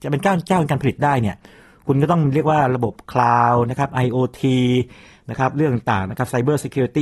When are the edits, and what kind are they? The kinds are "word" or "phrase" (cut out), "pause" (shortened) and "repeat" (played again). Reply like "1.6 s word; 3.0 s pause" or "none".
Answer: none